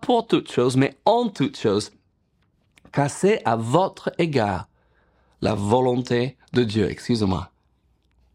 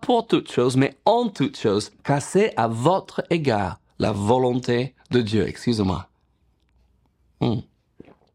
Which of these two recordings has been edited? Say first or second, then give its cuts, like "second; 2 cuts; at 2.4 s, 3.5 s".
second; 2 cuts; at 2.0 s, 3.9 s